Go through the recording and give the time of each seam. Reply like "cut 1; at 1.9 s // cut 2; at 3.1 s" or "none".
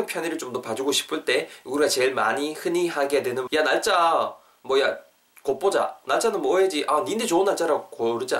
cut 1; at 3.5 s